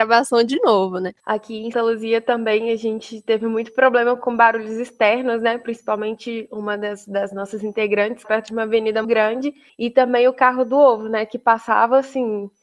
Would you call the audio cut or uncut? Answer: cut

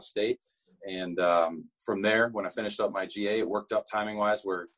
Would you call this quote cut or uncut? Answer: cut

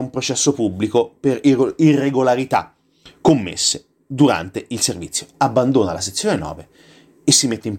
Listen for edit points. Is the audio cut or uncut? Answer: uncut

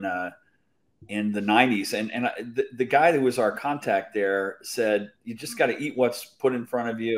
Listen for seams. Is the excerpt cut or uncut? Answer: uncut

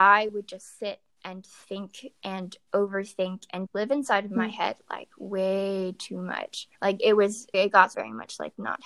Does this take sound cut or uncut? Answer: cut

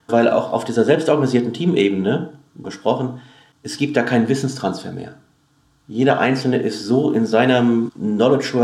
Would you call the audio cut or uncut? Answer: cut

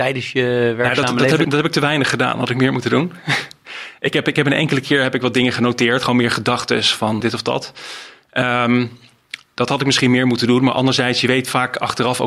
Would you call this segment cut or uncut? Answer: cut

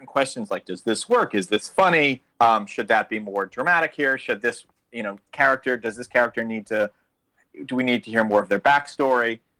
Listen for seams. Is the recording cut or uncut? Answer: cut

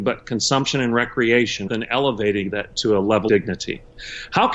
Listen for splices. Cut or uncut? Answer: cut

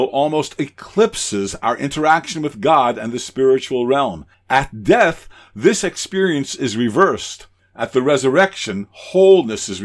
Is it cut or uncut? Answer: uncut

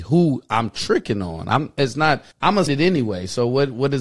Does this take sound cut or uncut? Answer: cut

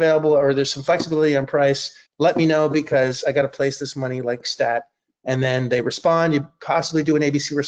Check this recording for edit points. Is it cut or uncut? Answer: cut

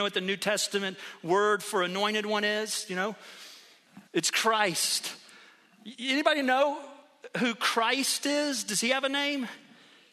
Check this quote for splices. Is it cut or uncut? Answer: cut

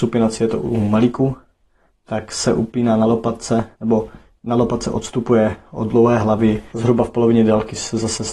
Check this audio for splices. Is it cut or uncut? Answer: cut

